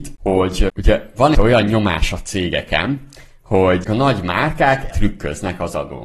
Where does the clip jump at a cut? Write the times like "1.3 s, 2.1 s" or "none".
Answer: 1.3 s, 3.8 s, 4.9 s